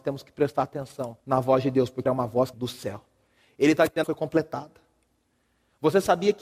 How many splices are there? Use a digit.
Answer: 4